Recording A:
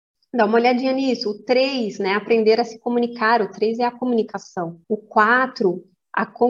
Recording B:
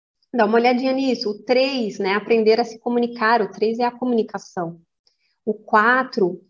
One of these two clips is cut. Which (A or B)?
A